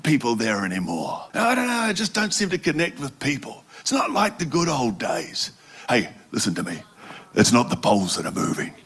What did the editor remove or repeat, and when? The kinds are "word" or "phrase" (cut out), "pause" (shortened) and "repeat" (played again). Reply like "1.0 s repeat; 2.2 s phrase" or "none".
1.3 s pause